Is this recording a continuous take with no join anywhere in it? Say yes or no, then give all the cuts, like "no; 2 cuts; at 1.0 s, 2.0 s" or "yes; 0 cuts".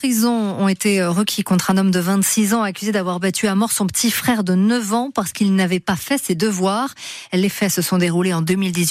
yes; 0 cuts